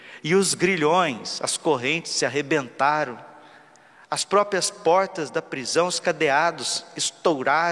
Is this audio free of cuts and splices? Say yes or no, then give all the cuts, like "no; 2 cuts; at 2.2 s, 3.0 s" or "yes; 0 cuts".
yes; 0 cuts